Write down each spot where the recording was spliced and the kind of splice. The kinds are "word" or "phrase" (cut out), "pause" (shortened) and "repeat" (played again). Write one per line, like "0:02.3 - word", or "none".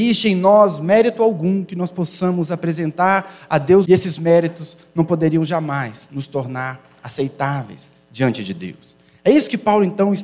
0:03.9 - phrase